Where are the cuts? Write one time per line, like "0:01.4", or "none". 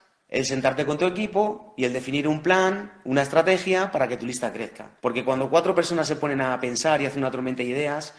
0:05.0